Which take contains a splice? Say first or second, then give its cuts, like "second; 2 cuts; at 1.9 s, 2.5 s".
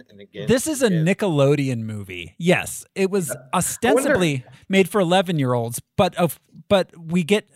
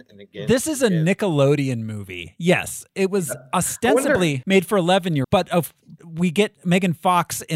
second; 3 cuts; at 4.4 s, 5.2 s, 6.0 s